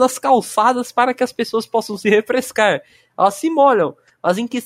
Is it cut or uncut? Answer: uncut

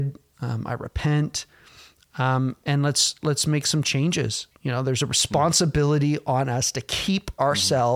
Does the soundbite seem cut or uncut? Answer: uncut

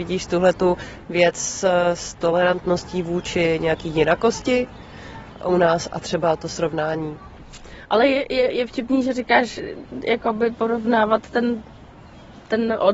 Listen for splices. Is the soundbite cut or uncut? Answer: uncut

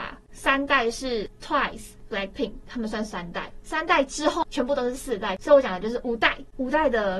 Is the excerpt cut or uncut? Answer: cut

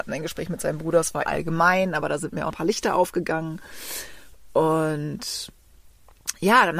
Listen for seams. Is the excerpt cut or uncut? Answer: cut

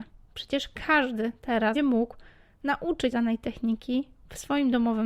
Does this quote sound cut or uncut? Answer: cut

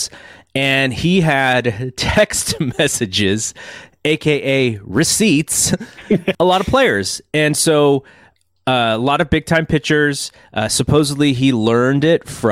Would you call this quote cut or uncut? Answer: cut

